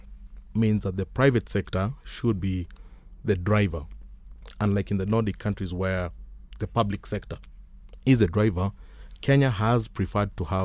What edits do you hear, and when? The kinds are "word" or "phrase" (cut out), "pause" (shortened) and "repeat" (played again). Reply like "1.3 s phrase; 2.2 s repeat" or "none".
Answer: none